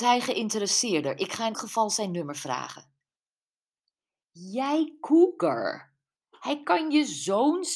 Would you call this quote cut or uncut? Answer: cut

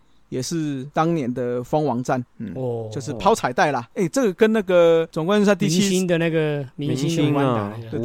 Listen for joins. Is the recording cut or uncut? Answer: cut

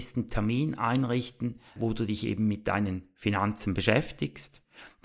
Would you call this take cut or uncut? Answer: cut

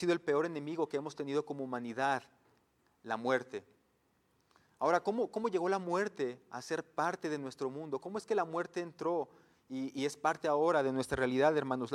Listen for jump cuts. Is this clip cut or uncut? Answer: uncut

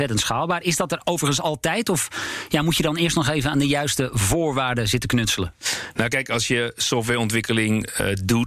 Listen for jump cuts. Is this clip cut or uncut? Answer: uncut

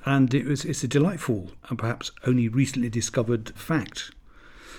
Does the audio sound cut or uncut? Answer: cut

